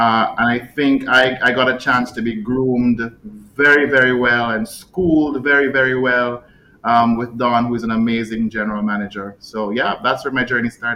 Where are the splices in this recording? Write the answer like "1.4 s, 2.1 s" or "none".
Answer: none